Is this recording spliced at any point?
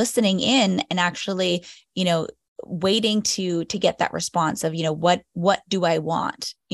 no; 0 cuts

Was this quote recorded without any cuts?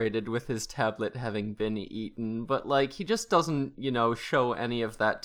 yes; 0 cuts

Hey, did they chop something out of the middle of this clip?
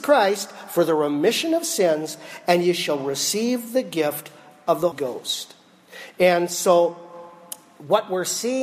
yes; 1 cut; at 4.9 s

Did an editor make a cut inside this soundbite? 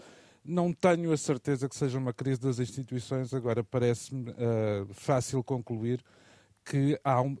no; 0 cuts

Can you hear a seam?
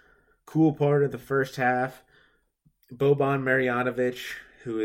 no; 0 cuts

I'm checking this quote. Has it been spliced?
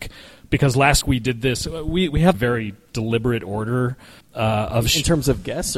yes; 3 cuts; at 1.0 s, 2.3 s, 4.2 s

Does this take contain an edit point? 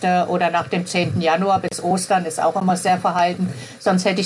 no; 0 cuts

